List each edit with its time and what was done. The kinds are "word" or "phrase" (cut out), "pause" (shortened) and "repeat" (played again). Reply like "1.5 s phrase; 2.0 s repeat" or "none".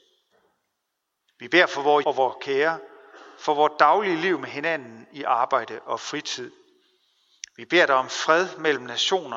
2.0 s word